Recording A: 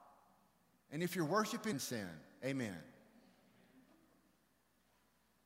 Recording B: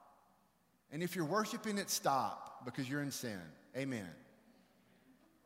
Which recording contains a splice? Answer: A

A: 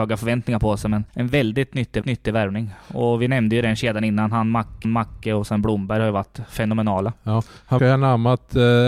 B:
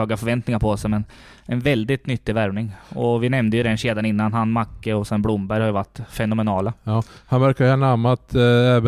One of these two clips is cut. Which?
A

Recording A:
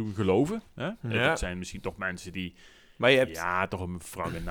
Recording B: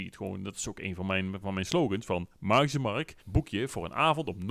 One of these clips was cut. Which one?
B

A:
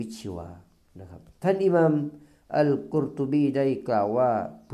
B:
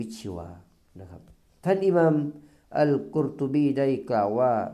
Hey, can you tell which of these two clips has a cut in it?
A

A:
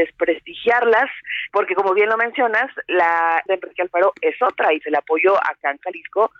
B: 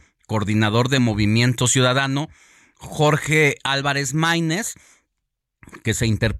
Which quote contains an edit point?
A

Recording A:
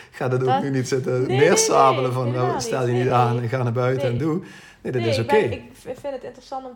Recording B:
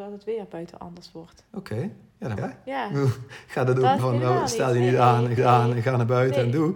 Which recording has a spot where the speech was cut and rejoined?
B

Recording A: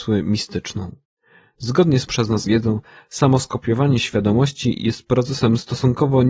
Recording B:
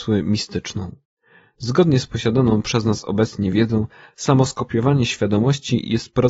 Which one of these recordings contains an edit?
A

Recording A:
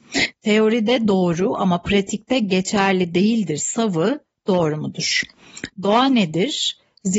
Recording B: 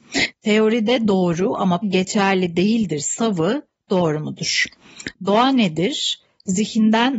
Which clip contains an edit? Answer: B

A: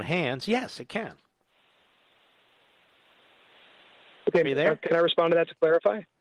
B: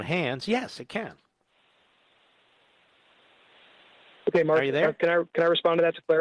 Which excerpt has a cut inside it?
A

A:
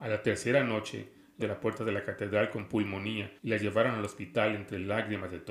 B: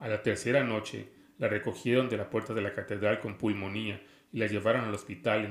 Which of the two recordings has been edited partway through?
A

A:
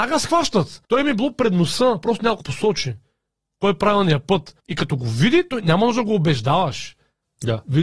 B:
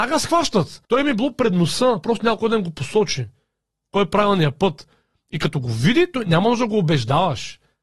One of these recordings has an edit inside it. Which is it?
A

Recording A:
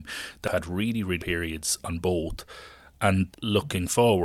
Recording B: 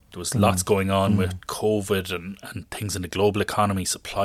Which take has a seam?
A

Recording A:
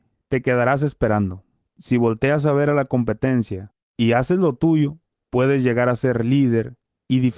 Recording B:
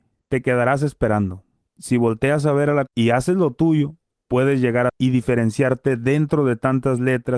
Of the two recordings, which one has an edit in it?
B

